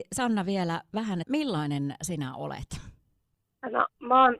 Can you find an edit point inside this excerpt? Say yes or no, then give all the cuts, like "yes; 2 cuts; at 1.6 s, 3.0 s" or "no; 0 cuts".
yes; 1 cut; at 1.2 s